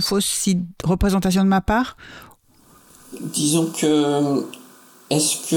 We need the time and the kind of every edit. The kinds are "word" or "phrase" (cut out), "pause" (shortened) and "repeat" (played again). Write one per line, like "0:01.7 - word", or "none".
none